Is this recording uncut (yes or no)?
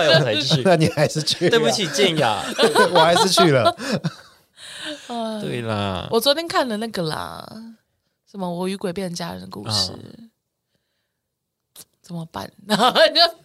yes